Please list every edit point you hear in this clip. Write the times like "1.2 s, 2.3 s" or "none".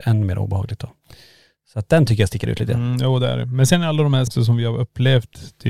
4.3 s